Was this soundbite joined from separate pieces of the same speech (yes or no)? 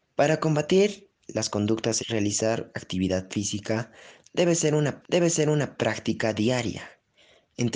yes